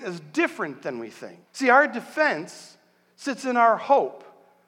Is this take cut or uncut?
cut